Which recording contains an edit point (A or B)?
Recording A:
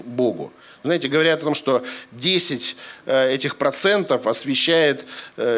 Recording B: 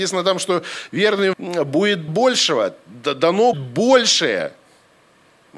B